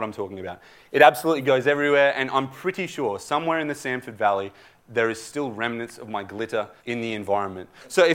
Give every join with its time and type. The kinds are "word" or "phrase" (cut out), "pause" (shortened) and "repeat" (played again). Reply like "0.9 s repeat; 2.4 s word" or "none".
6.8 s pause